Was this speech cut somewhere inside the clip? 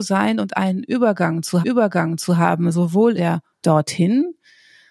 yes; 3 cuts; at 1.6 s, 3.2 s, 3.6 s

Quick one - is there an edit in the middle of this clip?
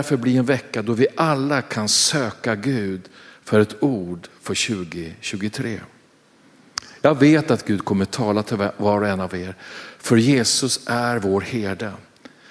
no; 0 cuts

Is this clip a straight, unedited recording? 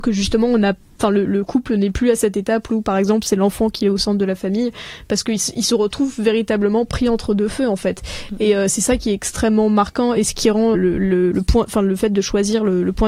no; 1 cut; at 10.7 s

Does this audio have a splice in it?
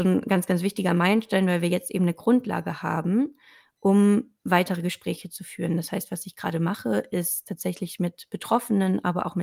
no; 0 cuts

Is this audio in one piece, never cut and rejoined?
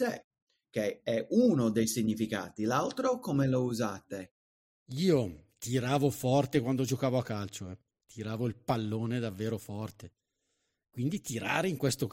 yes; 0 cuts

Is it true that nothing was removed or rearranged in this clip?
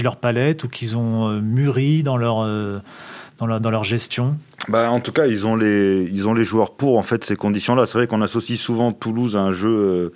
yes; 0 cuts

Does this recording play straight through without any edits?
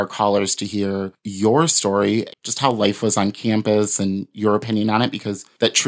no; 1 cut; at 2.3 s

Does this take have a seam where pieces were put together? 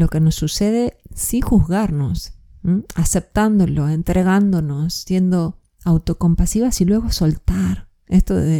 no; 0 cuts

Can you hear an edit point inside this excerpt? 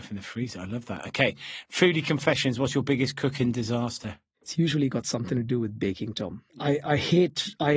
yes; 1 cut; at 6.5 s

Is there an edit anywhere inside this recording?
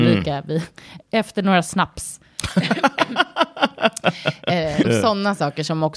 yes; 2 cuts; at 1.0 s, 4.8 s

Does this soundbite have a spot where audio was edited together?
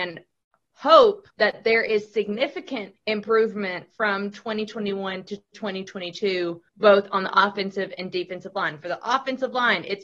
yes; 3 cuts; at 1.3 s, 3.0 s, 6.7 s

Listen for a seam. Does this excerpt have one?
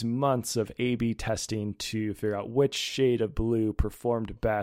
no; 0 cuts

